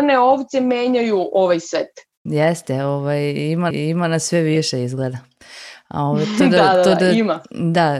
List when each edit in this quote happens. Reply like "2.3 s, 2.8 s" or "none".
3.7 s